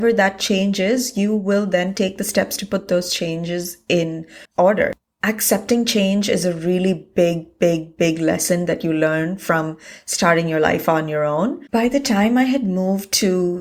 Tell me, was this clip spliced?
yes; 2 cuts; at 4.4 s, 11.7 s

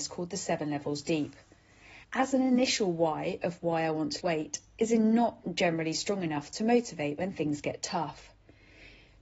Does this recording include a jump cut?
yes; 2 cuts; at 2.0 s, 4.2 s

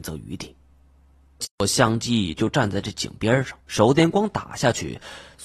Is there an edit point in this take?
yes; 1 cut; at 3.6 s

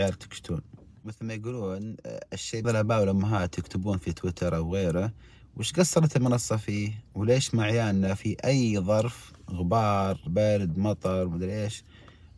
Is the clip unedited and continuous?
no; 2 cuts; at 2.6 s, 10.3 s

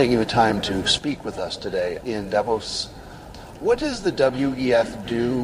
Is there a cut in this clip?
no; 0 cuts

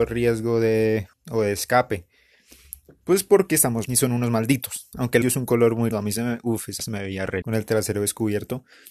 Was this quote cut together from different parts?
yes; 6 cuts; at 1.1 s, 3.9 s, 5.2 s, 5.9 s, 6.8 s, 7.4 s

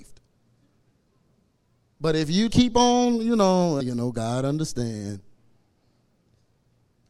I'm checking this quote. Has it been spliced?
yes; 2 cuts; at 2.5 s, 3.8 s

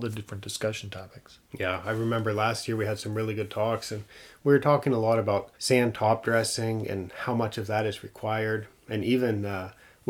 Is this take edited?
yes; 2 cuts; at 1.4 s, 5.5 s

